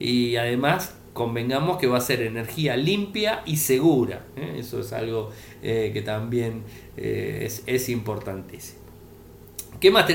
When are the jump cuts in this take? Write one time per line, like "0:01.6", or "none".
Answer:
none